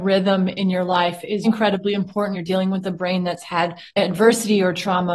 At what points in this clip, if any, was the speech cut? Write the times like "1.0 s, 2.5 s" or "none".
1.4 s, 2.3 s, 3.9 s